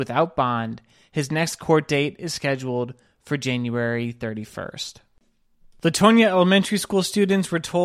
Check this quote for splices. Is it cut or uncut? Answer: uncut